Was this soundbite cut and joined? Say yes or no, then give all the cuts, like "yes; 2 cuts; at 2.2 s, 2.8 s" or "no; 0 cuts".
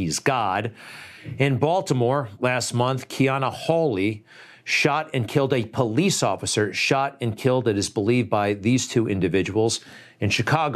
no; 0 cuts